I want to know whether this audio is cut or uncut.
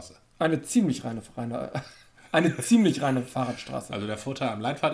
uncut